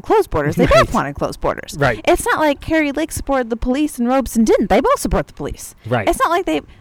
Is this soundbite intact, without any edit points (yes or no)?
yes